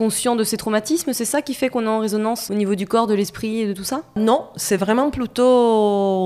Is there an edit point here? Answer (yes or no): no